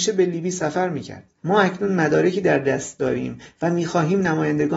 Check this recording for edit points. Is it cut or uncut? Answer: uncut